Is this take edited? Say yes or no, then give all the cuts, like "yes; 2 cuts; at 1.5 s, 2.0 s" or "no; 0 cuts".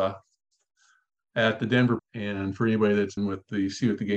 yes; 2 cuts; at 2.0 s, 3.2 s